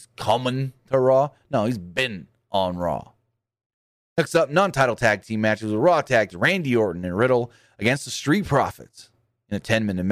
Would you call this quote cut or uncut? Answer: cut